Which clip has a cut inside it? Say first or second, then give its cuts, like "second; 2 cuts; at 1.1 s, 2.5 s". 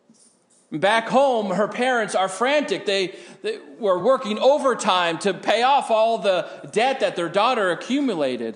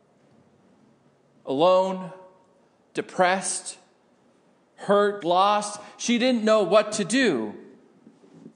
second; 1 cut; at 5.2 s